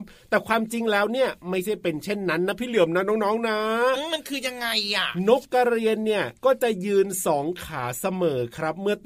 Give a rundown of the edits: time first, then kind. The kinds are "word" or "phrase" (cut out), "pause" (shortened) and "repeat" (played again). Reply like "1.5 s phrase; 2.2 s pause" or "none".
6.4 s pause